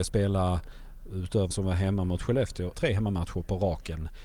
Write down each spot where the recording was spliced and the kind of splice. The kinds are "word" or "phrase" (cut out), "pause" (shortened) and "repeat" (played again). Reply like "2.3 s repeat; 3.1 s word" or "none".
1.5 s word; 2.7 s word